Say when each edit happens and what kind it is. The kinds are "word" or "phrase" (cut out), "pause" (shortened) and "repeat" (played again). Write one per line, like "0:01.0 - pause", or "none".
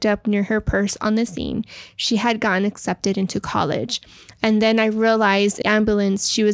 0:05.6 - word